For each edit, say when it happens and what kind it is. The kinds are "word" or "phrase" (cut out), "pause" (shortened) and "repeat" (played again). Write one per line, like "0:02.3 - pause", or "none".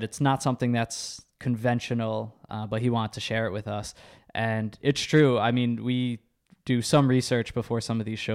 none